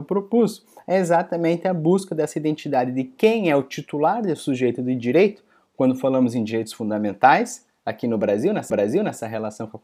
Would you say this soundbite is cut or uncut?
cut